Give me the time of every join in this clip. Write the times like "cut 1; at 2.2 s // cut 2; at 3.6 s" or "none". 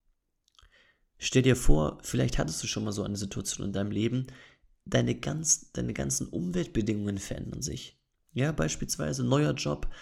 none